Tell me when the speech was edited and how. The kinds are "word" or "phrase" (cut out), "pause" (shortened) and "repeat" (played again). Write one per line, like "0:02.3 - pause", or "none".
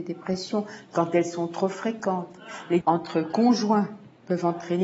0:02.8 - word